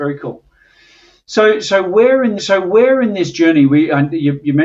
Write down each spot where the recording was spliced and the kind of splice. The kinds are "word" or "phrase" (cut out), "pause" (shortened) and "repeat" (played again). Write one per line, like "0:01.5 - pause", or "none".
0:02.4 - repeat